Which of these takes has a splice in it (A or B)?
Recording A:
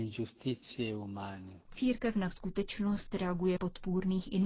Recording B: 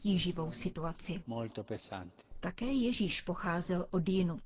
A